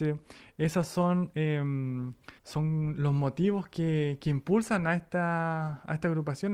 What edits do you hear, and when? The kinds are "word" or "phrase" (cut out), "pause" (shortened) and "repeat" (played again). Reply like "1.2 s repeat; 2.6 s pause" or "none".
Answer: 2.4 s pause